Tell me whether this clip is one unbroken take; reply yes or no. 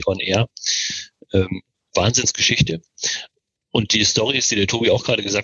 yes